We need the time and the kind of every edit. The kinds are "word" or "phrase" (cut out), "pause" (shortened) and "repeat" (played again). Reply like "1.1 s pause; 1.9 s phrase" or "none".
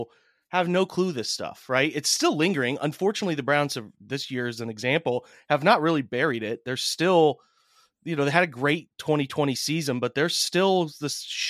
none